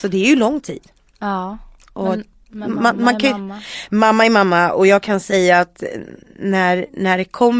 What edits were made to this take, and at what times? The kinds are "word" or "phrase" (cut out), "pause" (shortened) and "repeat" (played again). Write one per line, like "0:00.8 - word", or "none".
none